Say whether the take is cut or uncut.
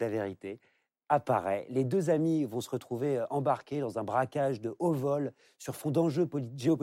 uncut